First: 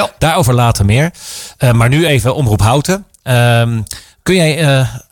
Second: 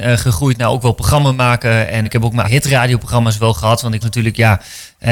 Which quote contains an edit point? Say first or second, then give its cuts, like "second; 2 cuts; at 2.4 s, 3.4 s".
second; 3 cuts; at 2.0 s, 2.4 s, 4.0 s